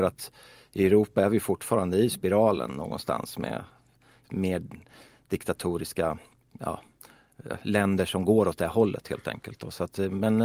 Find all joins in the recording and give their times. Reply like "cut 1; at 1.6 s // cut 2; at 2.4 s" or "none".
cut 1; at 4.2 s // cut 2; at 6.5 s

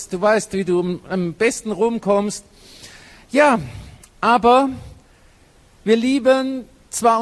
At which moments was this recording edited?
none

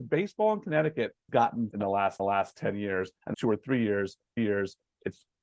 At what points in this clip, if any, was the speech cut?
cut 1; at 1.3 s // cut 2; at 1.7 s // cut 3; at 2.2 s // cut 4; at 3.3 s // cut 5; at 4.4 s

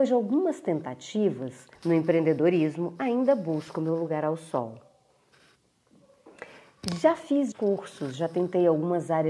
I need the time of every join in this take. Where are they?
cut 1; at 1.8 s // cut 2; at 7.5 s

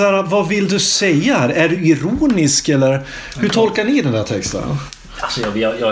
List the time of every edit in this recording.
none

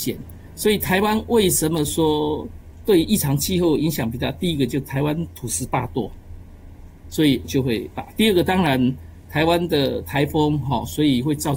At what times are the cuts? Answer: cut 1; at 7.4 s

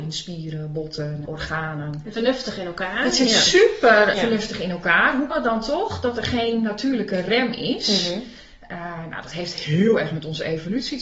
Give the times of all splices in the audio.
cut 1; at 1.3 s // cut 2; at 2.1 s // cut 3; at 4.1 s // cut 4; at 5.3 s

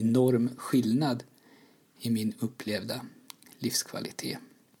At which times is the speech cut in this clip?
none

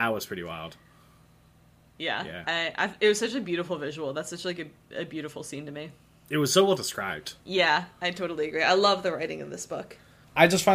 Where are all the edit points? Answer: cut 1; at 7.4 s

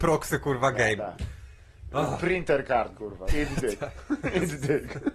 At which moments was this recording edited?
cut 1; at 1.0 s // cut 2; at 2.9 s // cut 3; at 3.3 s

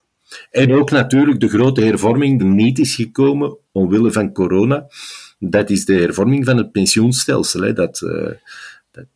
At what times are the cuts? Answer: cut 1; at 2.4 s // cut 2; at 3.6 s

